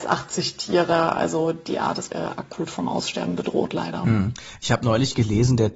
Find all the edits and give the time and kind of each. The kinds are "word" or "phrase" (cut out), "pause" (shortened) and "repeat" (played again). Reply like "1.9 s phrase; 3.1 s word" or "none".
2.1 s word